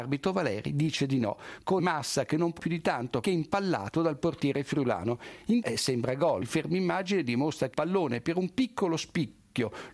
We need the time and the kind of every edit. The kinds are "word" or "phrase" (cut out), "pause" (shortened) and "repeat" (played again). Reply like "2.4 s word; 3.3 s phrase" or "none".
1.8 s word; 2.6 s word; 3.2 s word; 5.6 s word; 6.4 s word; 7.7 s word